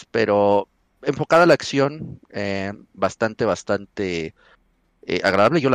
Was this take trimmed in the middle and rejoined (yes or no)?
no